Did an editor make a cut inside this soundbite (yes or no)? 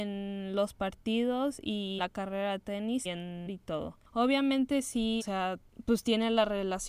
yes